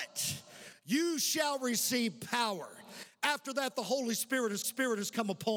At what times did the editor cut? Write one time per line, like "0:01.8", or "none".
0:04.6